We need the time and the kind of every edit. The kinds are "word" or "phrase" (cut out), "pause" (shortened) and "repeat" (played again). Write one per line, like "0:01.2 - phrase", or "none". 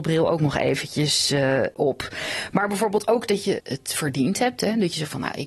0:03.6 - word

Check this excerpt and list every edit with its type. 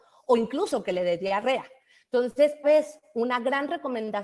0:02.6 - word

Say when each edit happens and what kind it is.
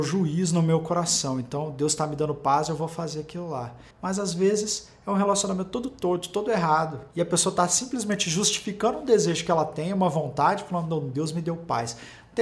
0:03.9 - pause
0:07.1 - pause

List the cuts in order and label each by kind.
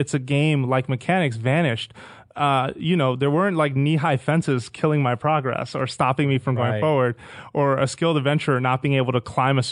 none

